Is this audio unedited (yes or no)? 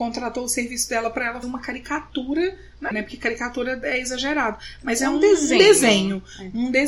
no